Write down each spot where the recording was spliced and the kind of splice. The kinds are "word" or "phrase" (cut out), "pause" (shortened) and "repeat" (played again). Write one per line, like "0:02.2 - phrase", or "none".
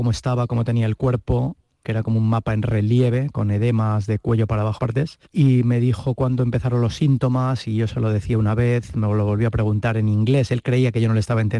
0:01.8 - word
0:04.8 - phrase
0:05.3 - pause